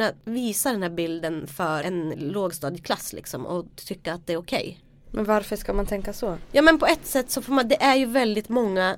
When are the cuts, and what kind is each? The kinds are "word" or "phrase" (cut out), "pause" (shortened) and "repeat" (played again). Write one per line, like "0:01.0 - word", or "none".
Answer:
0:01.8 - word
0:02.1 - word